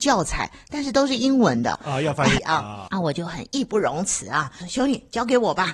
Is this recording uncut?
no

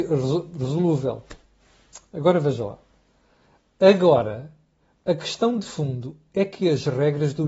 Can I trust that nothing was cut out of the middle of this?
yes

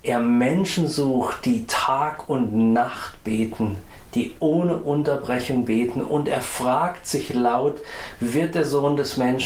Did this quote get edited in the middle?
no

